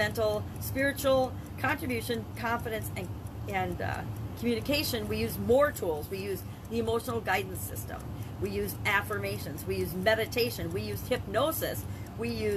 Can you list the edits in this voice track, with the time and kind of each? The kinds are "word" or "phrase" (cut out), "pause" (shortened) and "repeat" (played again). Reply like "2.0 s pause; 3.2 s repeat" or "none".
none

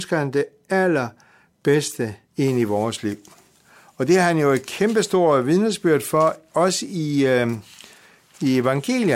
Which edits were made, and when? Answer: 2.2 s pause

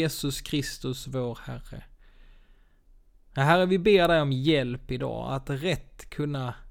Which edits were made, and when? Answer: none

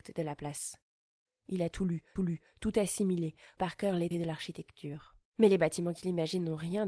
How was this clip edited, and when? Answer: 2.2 s repeat; 3.6 s word; 4.1 s word; 5.3 s pause

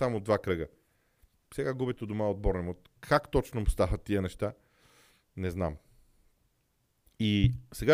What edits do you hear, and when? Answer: none

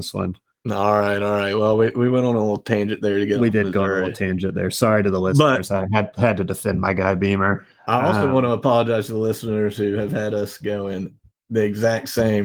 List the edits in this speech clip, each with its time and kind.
none

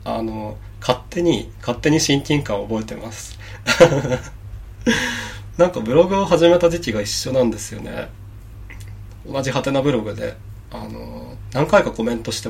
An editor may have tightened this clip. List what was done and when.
none

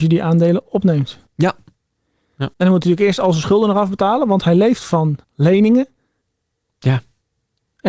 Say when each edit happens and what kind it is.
1.3 s pause; 2.5 s pause; 5.2 s pause

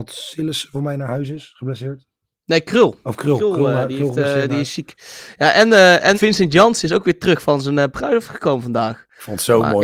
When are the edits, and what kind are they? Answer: 6.1 s word

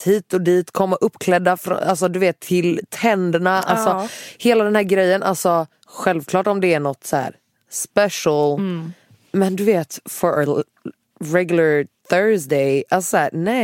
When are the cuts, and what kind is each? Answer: none

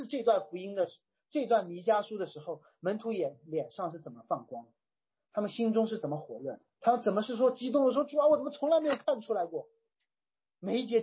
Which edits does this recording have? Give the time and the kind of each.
6.7 s pause

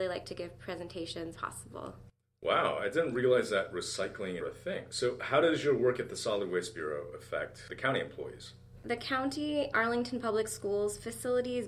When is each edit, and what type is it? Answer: 1.3 s word; 4.4 s phrase; 9.7 s word

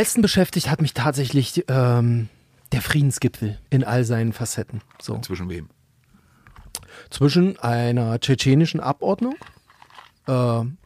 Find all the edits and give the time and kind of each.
3.6 s pause; 4.9 s pause

